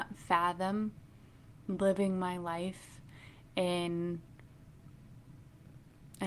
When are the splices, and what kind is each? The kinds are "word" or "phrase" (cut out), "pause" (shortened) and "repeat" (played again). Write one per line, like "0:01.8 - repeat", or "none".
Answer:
none

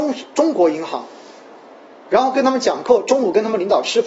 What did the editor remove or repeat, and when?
none

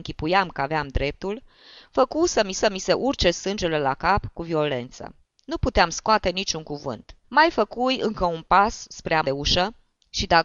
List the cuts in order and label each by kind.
0:02.5 - repeat
0:05.2 - pause
0:07.2 - pause
0:09.2 - word

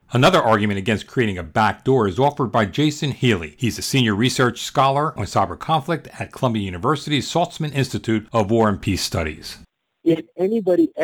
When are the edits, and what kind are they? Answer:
none

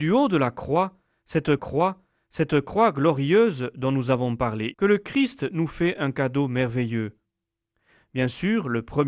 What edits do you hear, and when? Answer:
0:01.6 - repeat
0:04.7 - word

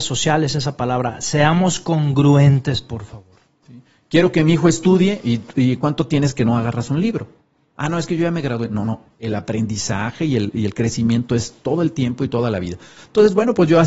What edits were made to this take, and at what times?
none

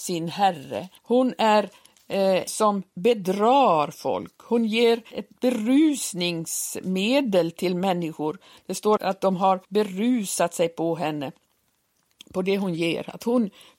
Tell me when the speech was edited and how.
0:01.0 - pause
0:02.5 - word
0:05.1 - word
0:09.0 - word
0:09.6 - pause

